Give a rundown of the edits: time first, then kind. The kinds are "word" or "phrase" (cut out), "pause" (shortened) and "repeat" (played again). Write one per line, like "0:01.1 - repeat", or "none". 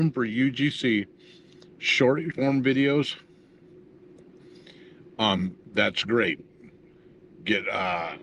0:02.3 - word
0:05.6 - pause